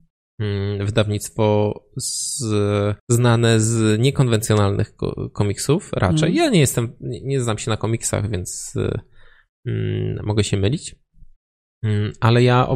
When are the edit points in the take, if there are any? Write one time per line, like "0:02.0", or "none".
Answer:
0:03.0